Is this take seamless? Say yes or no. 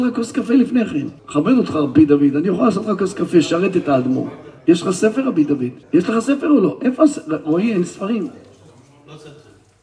no